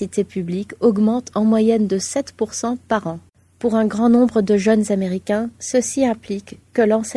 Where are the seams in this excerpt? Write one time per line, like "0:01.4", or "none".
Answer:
0:03.3